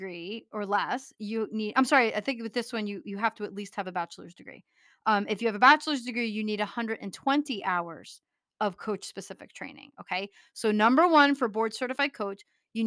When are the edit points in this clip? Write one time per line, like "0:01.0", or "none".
none